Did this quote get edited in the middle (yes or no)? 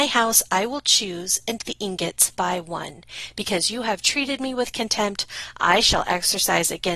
yes